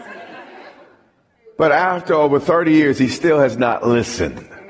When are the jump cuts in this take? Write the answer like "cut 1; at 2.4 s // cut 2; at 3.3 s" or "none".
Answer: none